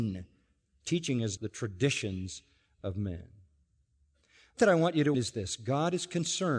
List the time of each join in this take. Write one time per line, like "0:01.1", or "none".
0:01.4
0:04.6
0:05.1